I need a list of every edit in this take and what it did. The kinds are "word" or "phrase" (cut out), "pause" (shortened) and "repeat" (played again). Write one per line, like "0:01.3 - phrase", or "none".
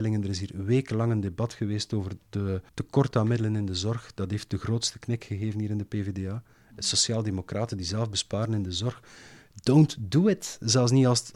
0:02.7 - pause